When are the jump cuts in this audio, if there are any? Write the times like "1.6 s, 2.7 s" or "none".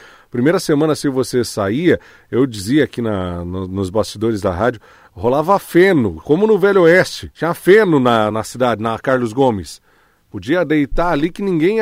7.3 s, 8.3 s